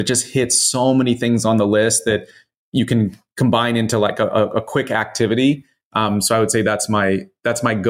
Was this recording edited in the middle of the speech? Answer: no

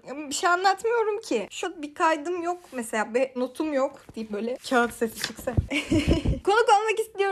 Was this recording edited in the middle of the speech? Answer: yes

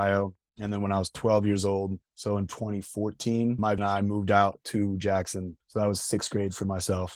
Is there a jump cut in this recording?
yes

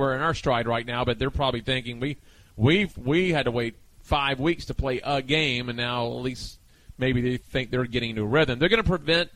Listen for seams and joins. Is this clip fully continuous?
yes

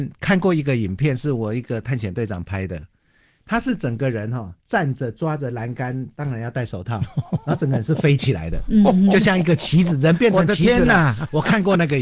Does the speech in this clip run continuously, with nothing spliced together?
yes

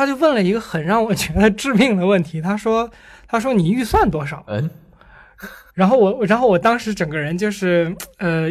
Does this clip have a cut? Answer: yes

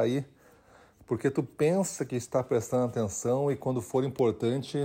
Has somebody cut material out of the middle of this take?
no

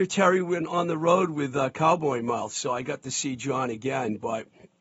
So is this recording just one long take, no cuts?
yes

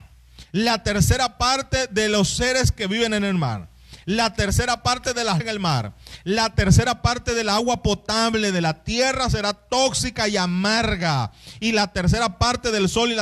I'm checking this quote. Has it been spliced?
yes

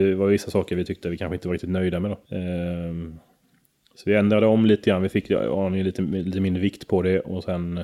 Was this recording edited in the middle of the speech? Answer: yes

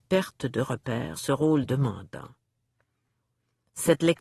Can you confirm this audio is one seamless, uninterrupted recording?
no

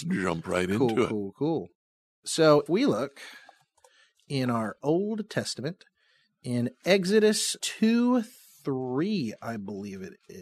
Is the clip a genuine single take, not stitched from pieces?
no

